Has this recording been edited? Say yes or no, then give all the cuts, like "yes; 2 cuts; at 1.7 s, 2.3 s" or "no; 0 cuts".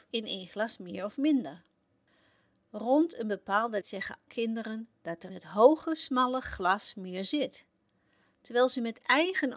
yes; 3 cuts; at 3.8 s, 4.3 s, 5.3 s